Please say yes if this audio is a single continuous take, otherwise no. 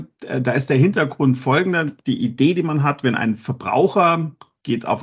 yes